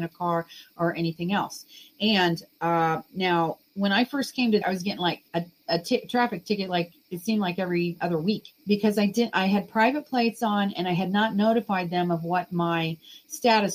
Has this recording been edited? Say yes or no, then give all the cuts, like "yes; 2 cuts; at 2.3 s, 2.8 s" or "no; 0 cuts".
yes; 4 cuts; at 3.7 s, 4.6 s, 5.3 s, 8.6 s